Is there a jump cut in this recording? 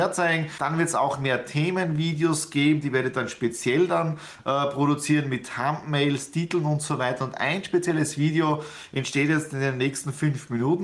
no; 0 cuts

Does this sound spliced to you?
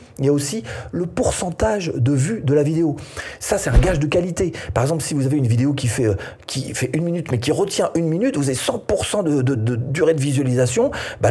yes; 1 cut; at 9.5 s

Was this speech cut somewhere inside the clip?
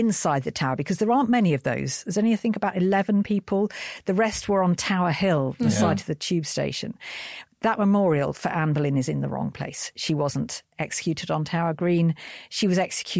no; 0 cuts

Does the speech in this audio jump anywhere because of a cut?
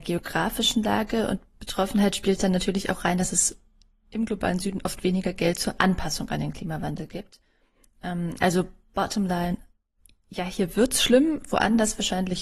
no; 0 cuts

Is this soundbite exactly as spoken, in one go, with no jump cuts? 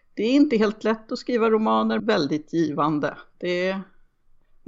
no; 1 cut; at 2.0 s

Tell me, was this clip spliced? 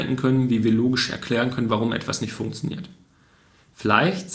no; 0 cuts

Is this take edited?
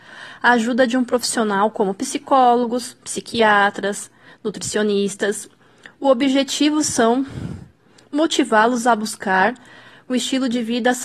no; 0 cuts

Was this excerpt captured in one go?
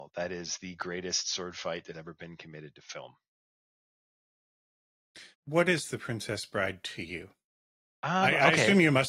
no; 3 cuts; at 1.9 s, 5.3 s, 7.8 s

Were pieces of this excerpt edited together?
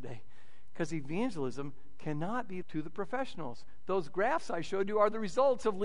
yes; 1 cut; at 2.6 s

